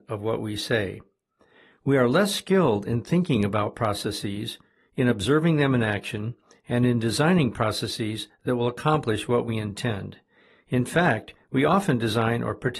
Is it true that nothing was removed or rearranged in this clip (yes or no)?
yes